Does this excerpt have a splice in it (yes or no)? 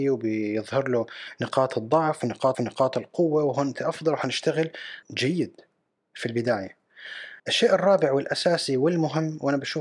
yes